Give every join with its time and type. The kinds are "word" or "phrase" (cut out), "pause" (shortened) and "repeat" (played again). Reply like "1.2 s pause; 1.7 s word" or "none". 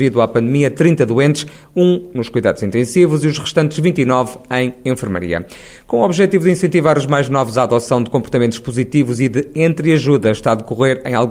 none